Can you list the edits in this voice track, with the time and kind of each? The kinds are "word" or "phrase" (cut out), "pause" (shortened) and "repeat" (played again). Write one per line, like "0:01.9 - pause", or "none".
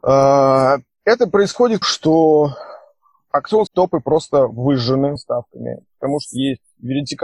0:01.8 - word
0:03.7 - phrase
0:05.2 - word